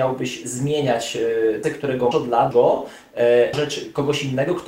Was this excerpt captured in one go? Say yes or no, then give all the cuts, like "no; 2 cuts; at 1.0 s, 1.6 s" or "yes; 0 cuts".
no; 4 cuts; at 1.6 s, 2.1 s, 2.5 s, 3.5 s